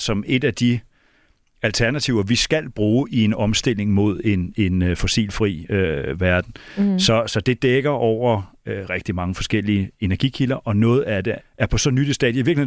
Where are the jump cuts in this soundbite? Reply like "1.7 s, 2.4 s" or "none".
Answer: 8.9 s, 11.4 s